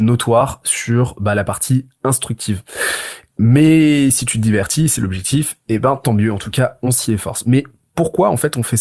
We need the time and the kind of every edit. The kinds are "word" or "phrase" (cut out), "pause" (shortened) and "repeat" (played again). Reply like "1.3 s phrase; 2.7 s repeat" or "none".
none